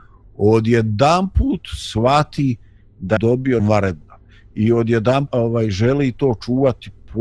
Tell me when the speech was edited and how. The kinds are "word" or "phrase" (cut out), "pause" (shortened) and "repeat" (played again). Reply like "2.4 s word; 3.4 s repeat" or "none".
3.2 s word; 3.6 s word; 5.3 s word